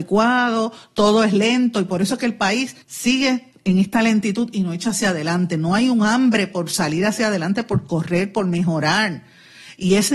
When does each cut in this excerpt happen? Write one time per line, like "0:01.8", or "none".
0:02.8

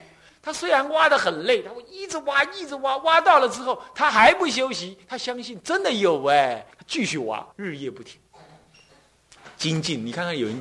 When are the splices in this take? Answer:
0:06.7
0:07.5

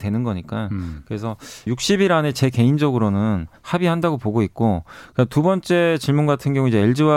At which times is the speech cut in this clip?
0:01.7
0:03.6

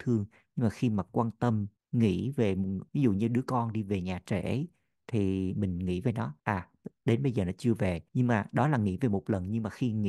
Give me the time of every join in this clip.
0:01.8
0:02.9
0:06.4
0:08.1

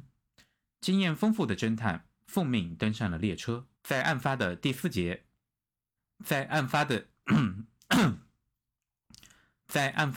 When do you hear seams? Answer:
0:03.7
0:06.0

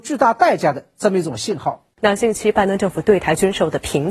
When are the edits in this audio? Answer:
0:01.9

